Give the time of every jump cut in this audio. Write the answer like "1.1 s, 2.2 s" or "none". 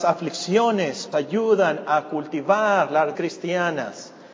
1.1 s, 3.1 s